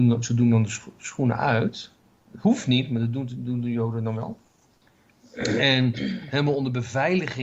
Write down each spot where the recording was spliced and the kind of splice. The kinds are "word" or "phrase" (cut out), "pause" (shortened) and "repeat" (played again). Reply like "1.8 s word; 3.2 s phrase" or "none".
none